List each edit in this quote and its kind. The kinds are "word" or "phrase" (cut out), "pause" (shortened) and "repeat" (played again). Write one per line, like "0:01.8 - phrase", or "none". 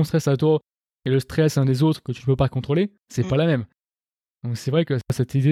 0:03.0 - pause